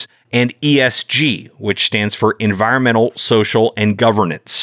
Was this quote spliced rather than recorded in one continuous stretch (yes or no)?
no